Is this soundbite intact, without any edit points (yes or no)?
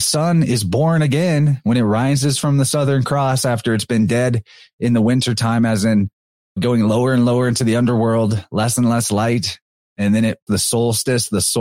no